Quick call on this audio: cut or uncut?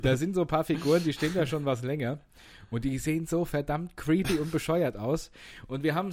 uncut